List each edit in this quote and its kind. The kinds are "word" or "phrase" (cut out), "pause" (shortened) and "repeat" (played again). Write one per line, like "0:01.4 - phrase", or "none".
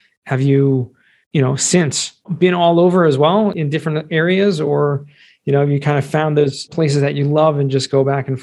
none